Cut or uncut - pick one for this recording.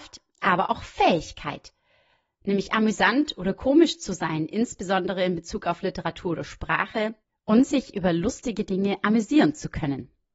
uncut